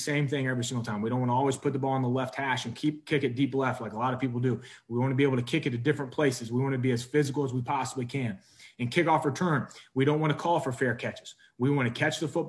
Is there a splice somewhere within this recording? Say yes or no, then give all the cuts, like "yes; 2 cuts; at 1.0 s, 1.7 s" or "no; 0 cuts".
no; 0 cuts